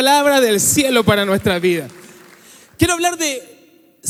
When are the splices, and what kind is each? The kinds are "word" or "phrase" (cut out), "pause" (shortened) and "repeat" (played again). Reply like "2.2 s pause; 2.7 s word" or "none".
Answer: none